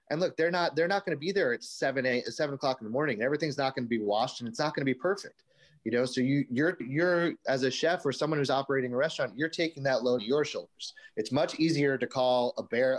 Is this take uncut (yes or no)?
no